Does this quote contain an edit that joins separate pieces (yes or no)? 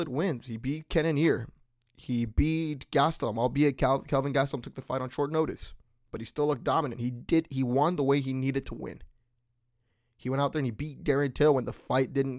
no